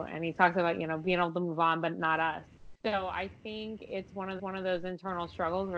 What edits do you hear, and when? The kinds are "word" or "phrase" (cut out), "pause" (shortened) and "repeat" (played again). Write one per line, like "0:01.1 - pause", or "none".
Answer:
0:02.8 - pause
0:04.4 - repeat